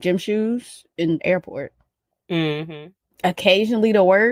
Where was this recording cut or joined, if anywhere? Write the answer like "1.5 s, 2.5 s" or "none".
1.2 s

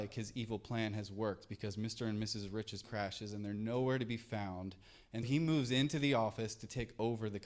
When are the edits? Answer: 2.8 s, 5.2 s

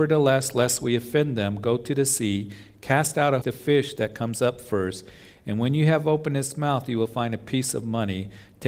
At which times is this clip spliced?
3.4 s

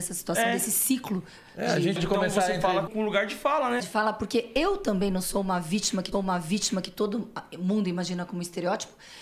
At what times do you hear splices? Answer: 2.0 s, 2.9 s, 3.8 s, 6.1 s

